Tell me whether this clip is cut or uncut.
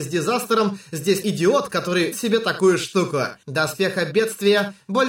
cut